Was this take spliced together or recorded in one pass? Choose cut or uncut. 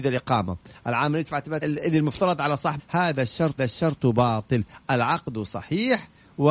cut